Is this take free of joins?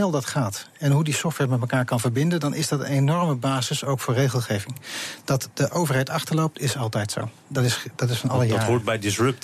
yes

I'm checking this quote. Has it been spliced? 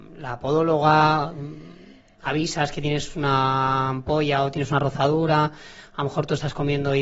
no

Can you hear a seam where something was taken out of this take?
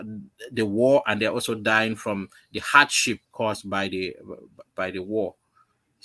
yes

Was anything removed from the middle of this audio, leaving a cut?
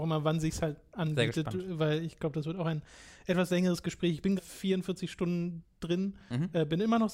yes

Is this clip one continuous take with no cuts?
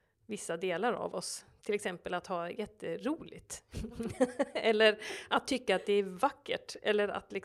yes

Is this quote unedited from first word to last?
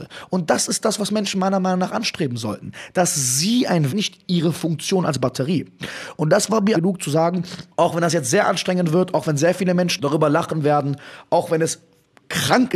no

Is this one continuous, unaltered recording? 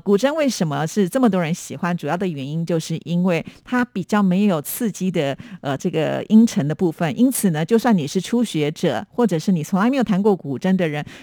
yes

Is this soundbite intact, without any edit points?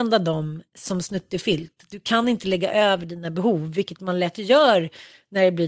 yes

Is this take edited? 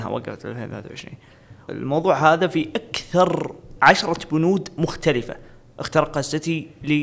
yes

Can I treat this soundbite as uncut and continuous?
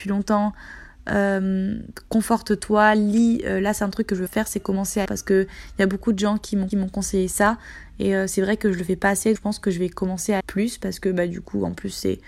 no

